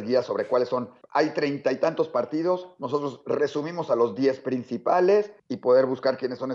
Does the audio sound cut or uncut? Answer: cut